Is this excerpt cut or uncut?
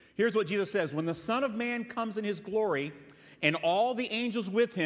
uncut